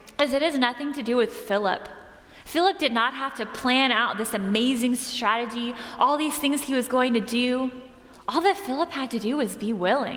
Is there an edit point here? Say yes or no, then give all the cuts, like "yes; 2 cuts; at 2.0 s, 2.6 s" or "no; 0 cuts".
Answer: no; 0 cuts